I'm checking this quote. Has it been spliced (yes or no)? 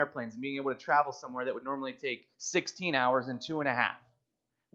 yes